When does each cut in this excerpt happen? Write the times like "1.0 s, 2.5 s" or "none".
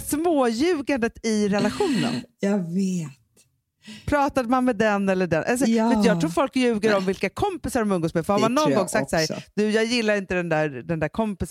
none